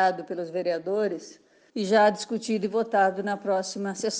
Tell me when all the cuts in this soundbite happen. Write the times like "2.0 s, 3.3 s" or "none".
none